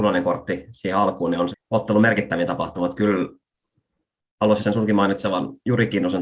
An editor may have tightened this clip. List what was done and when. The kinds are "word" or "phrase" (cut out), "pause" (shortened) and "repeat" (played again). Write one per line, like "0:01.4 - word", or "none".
0:01.5 - word
0:04.6 - word